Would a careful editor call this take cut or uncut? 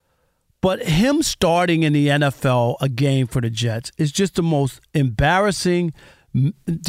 uncut